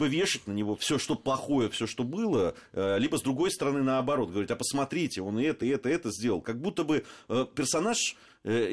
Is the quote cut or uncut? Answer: uncut